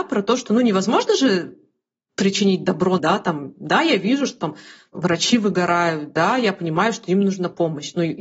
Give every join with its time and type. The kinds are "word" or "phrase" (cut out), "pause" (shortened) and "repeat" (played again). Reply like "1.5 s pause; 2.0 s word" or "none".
3.0 s word